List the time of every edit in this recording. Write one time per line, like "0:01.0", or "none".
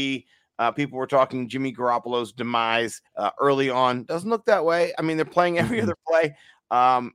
0:03.1